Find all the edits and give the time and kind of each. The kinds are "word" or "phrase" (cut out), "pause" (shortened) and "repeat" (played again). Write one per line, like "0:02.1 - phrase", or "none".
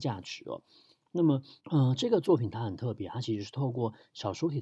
0:01.6 - pause